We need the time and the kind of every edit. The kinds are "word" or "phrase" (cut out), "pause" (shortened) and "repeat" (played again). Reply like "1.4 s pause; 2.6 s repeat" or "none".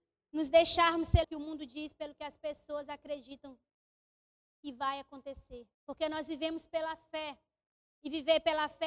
1.2 s phrase; 5.7 s pause